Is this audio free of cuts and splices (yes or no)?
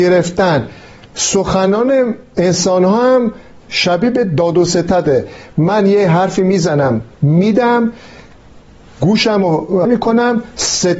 no